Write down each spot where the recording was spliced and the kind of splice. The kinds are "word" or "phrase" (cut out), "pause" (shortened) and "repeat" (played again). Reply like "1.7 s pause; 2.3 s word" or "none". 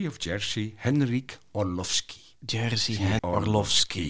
2.4 s pause; 3.2 s word